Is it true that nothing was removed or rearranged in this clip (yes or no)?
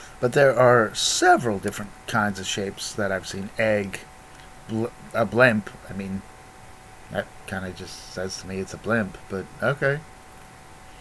yes